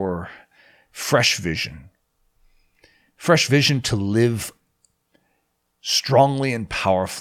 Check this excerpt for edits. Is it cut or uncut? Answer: uncut